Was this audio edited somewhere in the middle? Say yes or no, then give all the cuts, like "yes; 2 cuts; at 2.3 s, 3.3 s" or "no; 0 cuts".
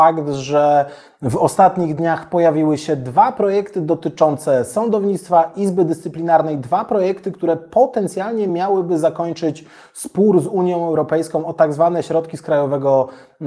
no; 0 cuts